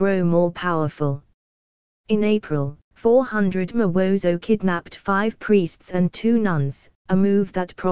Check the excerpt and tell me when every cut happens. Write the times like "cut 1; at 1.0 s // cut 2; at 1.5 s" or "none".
none